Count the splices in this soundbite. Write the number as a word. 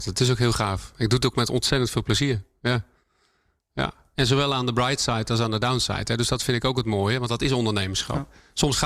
zero